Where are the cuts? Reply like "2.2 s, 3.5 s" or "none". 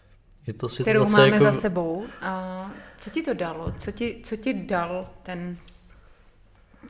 none